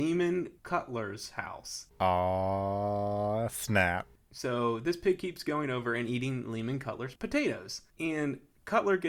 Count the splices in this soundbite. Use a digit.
1